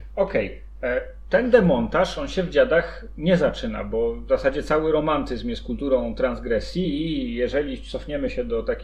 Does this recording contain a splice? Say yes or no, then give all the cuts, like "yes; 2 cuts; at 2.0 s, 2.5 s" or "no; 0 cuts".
no; 0 cuts